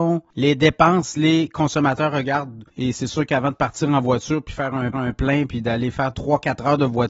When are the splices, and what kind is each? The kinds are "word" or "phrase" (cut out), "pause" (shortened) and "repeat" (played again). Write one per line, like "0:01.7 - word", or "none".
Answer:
0:02.7 - pause
0:04.9 - repeat
0:06.1 - word